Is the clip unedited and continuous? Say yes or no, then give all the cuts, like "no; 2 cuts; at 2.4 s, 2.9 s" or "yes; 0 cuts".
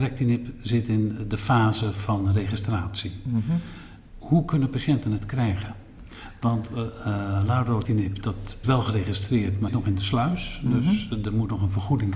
no; 3 cuts; at 7.8 s, 8.6 s, 9.7 s